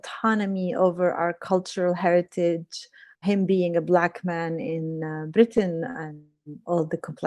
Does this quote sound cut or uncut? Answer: cut